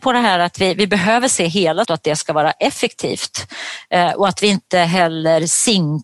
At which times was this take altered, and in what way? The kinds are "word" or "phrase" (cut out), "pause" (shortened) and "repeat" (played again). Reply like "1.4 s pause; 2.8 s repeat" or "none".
1.8 s word